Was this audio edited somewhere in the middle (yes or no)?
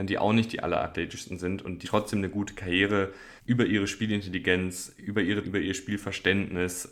yes